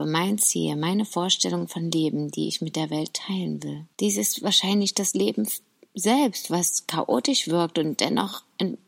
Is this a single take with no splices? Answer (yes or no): no